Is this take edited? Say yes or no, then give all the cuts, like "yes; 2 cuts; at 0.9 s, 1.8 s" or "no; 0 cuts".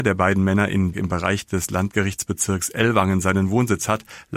yes; 1 cut; at 0.9 s